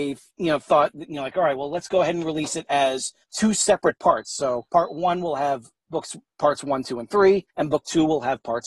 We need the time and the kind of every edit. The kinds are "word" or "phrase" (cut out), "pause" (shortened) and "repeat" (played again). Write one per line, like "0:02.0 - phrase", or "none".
0:03.2 - pause
0:04.7 - pause
0:07.5 - pause